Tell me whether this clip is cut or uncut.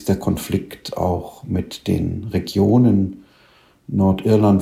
uncut